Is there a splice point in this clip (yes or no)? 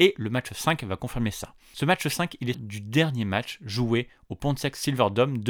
yes